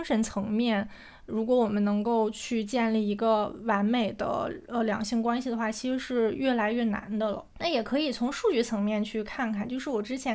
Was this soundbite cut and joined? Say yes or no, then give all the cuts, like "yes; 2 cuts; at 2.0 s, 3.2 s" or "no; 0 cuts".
yes; 1 cut; at 7.5 s